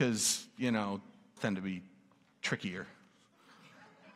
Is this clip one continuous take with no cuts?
no; 1 cut; at 1.4 s

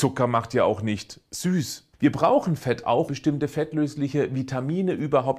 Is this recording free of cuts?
no; 2 cuts; at 1.9 s, 3.1 s

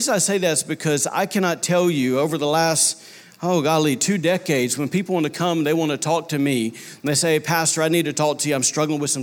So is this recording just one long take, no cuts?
yes; 0 cuts

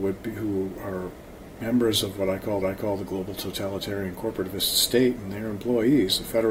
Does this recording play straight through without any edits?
no; 1 cut; at 2.6 s

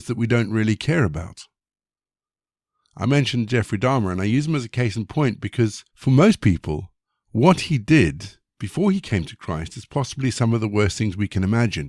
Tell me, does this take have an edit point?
yes; 1 cut; at 5.9 s

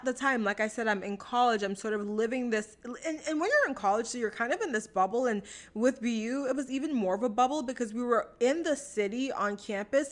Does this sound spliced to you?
no; 0 cuts

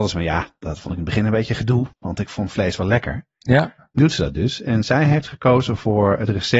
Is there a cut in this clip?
yes; 2 cuts; at 1.9 s, 4.0 s

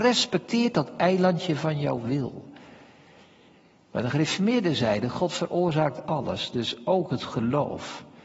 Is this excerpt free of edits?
yes; 0 cuts

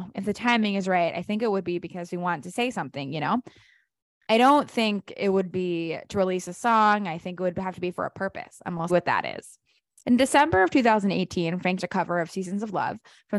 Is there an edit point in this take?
yes; 3 cuts; at 5.5 s, 8.9 s, 11.8 s

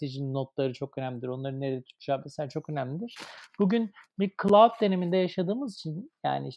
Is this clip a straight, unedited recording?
yes; 0 cuts

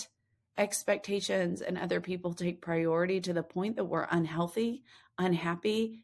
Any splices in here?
no; 0 cuts

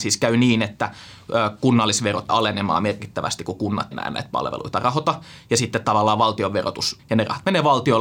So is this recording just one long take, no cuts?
no; 3 cuts; at 2.3 s, 3.9 s, 7.0 s

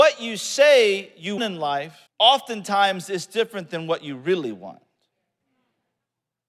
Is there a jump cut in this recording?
yes; 2 cuts; at 1.4 s, 2.1 s

